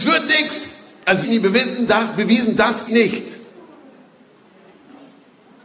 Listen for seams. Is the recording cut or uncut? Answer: cut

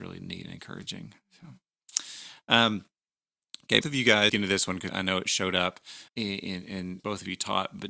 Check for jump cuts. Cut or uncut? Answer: cut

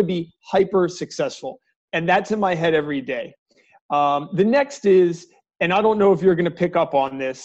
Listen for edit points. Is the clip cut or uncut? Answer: uncut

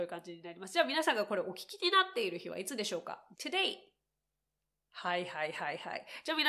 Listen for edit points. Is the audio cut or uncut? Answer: cut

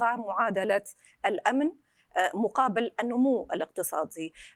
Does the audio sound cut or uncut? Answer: uncut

